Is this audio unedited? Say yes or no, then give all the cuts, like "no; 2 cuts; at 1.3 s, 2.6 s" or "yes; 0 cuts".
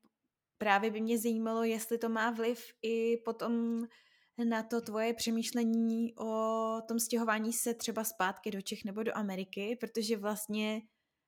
yes; 0 cuts